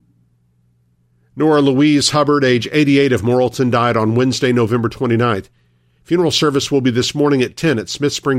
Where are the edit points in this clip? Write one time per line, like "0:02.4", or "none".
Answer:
none